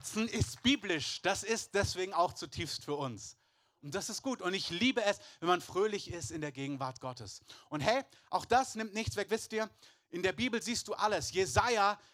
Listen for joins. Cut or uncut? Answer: uncut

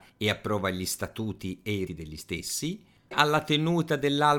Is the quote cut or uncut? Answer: cut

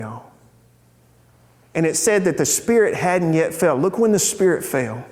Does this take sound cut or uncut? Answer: uncut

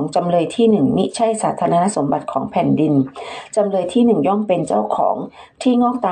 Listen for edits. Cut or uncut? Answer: uncut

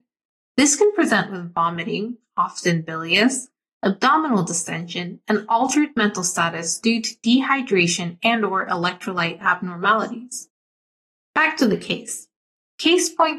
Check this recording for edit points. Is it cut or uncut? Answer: uncut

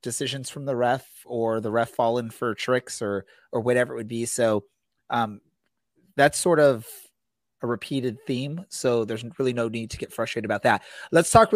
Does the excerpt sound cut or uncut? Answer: uncut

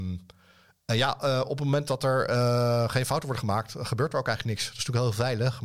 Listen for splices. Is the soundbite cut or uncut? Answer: uncut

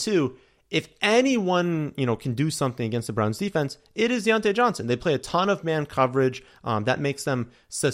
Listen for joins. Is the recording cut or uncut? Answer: uncut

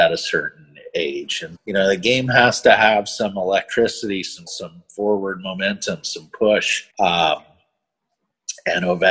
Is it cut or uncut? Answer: cut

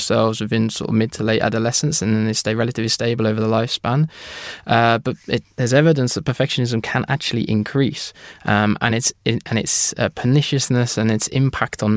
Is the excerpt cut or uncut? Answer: uncut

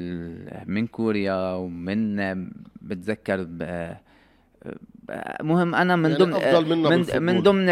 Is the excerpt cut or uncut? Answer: uncut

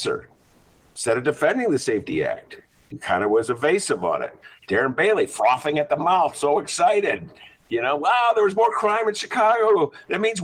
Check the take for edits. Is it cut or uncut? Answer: cut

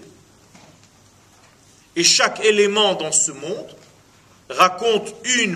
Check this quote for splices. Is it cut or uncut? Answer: uncut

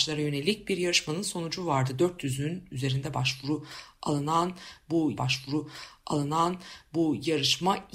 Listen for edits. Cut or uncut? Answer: cut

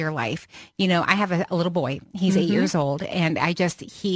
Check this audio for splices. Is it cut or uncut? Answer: uncut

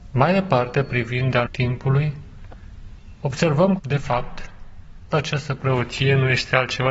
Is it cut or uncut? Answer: cut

